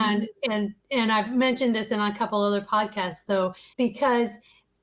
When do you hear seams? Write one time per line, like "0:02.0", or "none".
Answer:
0:03.7